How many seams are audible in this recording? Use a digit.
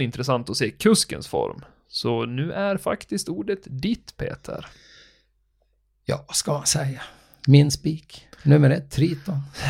0